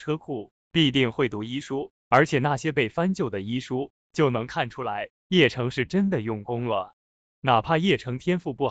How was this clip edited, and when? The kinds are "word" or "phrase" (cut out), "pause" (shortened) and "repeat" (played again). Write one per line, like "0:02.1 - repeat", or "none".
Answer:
none